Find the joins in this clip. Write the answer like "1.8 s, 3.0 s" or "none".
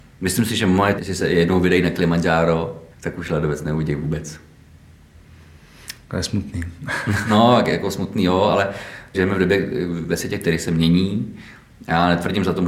1.0 s, 2.9 s, 9.1 s